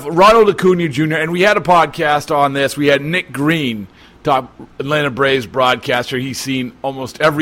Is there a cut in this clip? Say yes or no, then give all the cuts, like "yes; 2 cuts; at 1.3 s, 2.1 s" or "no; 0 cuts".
no; 0 cuts